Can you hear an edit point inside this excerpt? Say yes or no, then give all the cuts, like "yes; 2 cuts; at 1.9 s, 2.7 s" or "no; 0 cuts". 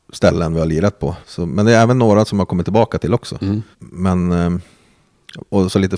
yes; 2 cuts; at 1.2 s, 3.7 s